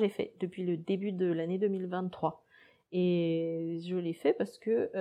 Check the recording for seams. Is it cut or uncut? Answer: uncut